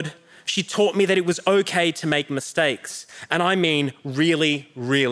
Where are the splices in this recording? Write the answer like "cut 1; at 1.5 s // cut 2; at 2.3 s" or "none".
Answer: none